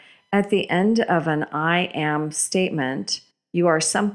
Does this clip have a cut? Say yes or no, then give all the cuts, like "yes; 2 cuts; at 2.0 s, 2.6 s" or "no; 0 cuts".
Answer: no; 0 cuts